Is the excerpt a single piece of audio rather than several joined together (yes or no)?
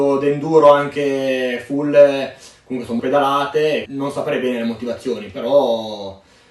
no